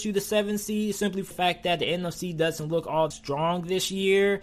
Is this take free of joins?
no; 2 cuts; at 1.3 s, 3.1 s

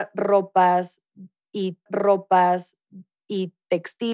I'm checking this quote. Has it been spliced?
yes; 1 cut; at 1.9 s

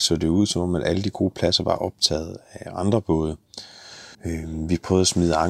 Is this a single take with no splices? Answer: no; 1 cut; at 4.1 s

